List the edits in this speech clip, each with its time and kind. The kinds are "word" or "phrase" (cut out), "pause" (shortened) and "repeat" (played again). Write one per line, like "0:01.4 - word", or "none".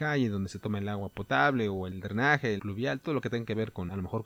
0:02.6 - word